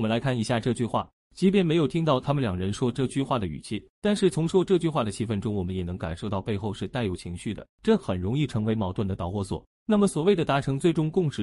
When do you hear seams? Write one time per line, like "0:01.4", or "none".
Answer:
0:03.9
0:07.7